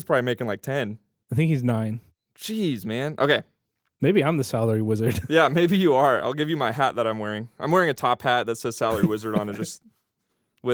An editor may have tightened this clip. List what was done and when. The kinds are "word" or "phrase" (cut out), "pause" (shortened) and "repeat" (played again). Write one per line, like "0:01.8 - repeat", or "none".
none